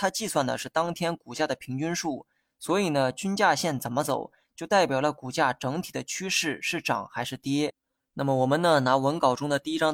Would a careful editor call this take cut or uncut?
uncut